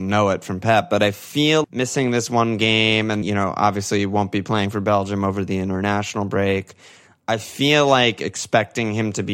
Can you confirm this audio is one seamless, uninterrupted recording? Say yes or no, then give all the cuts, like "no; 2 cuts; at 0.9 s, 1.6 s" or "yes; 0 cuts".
no; 2 cuts; at 1.6 s, 3.2 s